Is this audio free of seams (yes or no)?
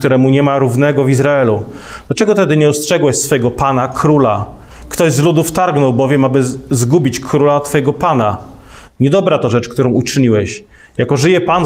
yes